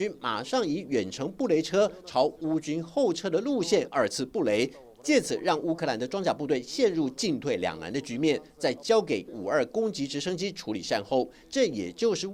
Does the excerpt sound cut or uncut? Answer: cut